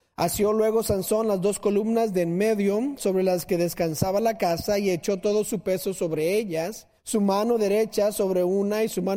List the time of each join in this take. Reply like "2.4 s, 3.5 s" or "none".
7.0 s